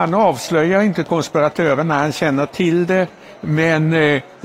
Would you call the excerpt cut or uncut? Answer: uncut